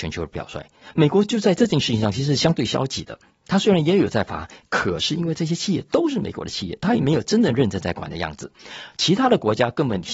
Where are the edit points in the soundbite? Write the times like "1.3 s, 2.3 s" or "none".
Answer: none